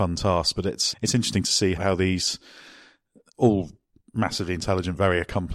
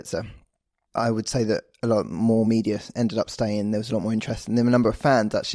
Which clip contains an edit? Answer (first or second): first